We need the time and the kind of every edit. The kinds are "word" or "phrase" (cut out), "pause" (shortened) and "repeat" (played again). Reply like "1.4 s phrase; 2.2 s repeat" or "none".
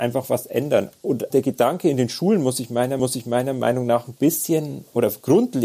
1.3 s word; 3.0 s repeat